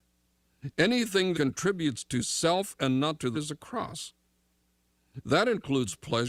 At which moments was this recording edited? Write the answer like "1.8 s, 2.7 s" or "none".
1.3 s, 3.3 s